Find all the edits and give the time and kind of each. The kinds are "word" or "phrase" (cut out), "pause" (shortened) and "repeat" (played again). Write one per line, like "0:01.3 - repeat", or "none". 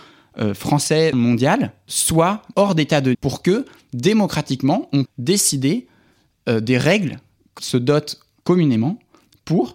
0:01.1 - word
0:02.5 - word
0:03.1 - word
0:05.1 - word
0:07.6 - word

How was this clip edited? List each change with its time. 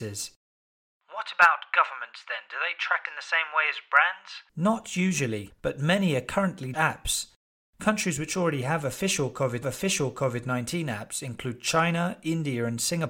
0:03.0 - word
0:04.5 - pause
0:06.7 - phrase
0:09.6 - repeat

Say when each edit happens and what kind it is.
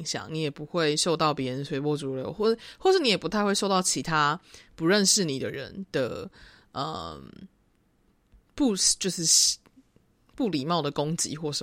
none

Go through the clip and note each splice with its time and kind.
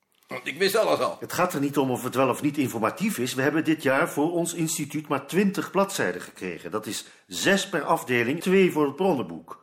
0:08.4 - word

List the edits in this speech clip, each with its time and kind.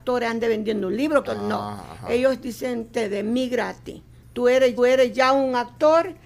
0:01.2 - phrase
0:04.8 - repeat

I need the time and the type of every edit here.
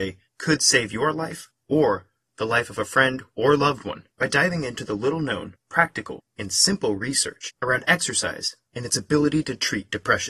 none

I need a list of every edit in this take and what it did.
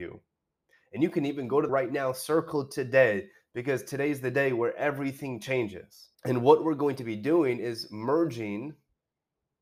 0:01.7 - phrase
0:06.1 - pause

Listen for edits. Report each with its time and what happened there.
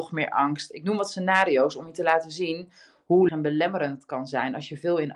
0:03.3 - word

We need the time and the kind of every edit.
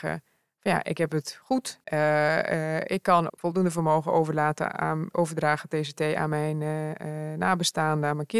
0:01.8 - pause
0:03.3 - word
0:05.1 - word

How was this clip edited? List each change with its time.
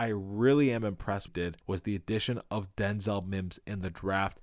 0:01.3 - phrase
0:01.6 - pause

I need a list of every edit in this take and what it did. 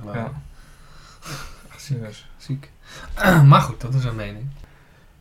none

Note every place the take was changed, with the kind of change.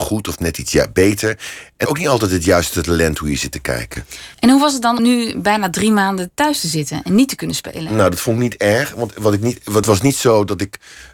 0:01.9 - phrase
0:04.3 - pause
0:05.0 - word
0:09.8 - phrase

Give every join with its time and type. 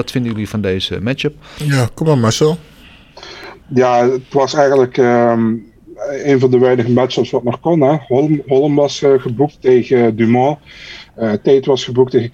0:03.6 - pause

